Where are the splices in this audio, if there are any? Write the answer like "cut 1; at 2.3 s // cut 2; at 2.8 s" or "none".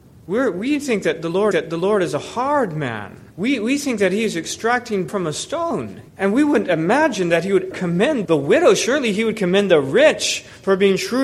cut 1; at 1.5 s // cut 2; at 3.3 s // cut 3; at 5.1 s // cut 4; at 6.1 s // cut 5; at 7.7 s // cut 6; at 8.2 s